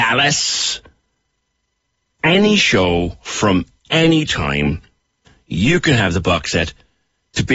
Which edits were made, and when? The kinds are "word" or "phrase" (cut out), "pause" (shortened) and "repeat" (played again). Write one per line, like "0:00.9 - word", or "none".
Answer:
none